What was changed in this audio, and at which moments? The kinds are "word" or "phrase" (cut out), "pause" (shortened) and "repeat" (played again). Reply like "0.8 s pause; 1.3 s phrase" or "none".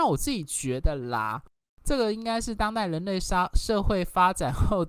none